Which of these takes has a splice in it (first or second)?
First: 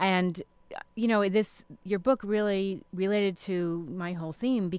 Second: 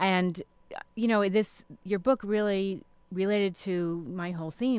first